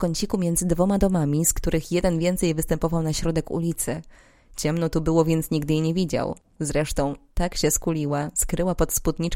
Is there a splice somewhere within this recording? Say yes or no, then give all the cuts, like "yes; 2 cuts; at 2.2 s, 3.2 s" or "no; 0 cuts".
no; 0 cuts